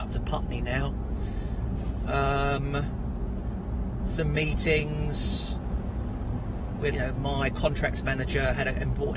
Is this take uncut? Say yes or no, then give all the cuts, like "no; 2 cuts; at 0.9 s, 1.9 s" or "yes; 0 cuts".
no; 1 cut; at 6.9 s